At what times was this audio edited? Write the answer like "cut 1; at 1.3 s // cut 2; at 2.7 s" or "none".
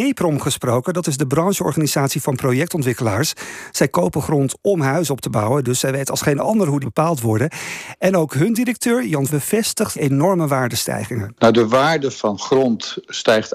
cut 1; at 6.8 s // cut 2; at 9.3 s // cut 3; at 9.9 s // cut 4; at 12.1 s

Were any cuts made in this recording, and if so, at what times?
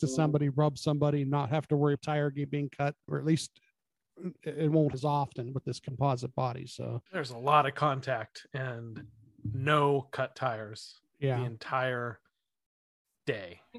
cut 1; at 2.0 s // cut 2; at 3.1 s // cut 3; at 4.9 s // cut 4; at 7.1 s

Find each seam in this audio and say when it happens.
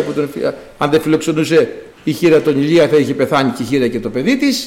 cut 1; at 1.9 s

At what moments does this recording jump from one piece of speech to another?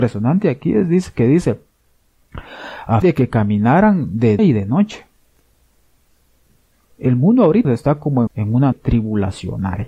cut 1; at 3.0 s // cut 2; at 4.4 s // cut 3; at 7.6 s // cut 4; at 8.3 s // cut 5; at 8.7 s

